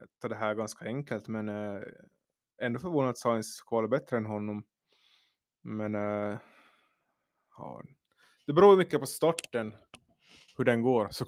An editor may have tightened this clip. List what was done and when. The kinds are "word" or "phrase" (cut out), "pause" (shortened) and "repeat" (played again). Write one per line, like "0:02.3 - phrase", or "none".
none